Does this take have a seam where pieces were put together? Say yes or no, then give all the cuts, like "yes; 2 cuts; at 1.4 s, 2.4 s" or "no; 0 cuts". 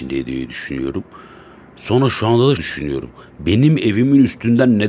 yes; 1 cut; at 2.6 s